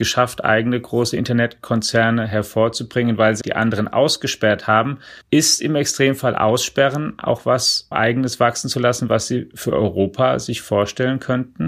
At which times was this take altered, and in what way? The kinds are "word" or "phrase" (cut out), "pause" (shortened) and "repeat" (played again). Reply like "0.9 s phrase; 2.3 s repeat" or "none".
3.4 s word; 5.2 s pause; 7.9 s word